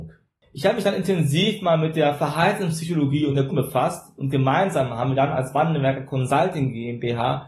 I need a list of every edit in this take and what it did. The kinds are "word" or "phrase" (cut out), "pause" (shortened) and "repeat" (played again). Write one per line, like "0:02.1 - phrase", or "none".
0:03.5 - word